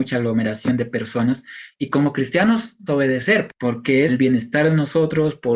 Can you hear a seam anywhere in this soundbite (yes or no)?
yes